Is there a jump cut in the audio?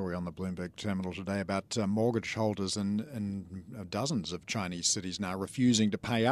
no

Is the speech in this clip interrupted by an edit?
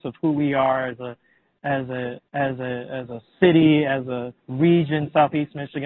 yes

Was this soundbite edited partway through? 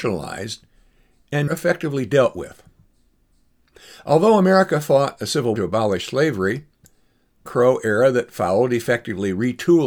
yes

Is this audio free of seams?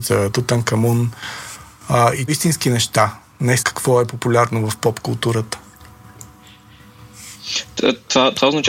no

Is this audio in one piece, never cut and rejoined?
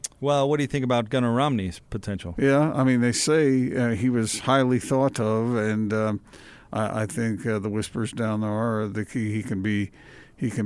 yes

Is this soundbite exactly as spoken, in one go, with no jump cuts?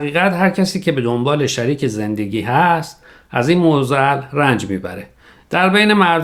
yes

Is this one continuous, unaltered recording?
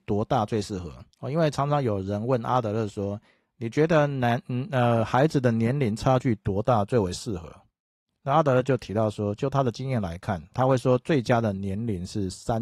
no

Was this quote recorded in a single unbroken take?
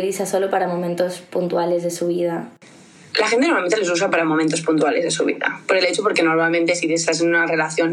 yes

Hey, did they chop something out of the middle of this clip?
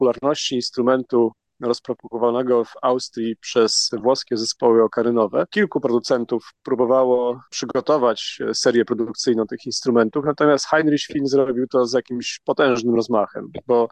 no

